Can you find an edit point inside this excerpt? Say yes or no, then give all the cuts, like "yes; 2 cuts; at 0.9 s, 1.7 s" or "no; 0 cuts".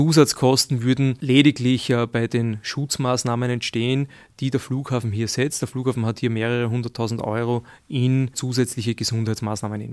no; 0 cuts